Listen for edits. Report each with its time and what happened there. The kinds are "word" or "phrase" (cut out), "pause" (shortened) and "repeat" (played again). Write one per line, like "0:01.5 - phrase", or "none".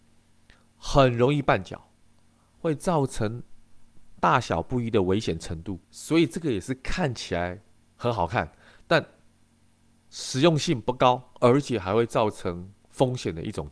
0:05.8 - pause